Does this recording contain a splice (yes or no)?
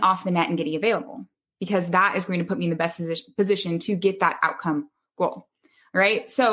no